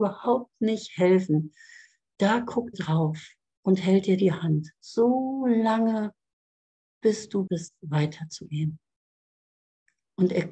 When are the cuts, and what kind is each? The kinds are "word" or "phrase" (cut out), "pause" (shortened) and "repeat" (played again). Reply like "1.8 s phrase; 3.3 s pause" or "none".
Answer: 2.7 s word; 7.5 s word